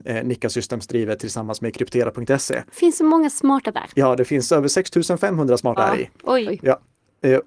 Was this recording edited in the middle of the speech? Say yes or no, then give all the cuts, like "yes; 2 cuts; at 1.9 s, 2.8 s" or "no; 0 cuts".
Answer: yes; 3 cuts; at 3.7 s, 5.8 s, 6.5 s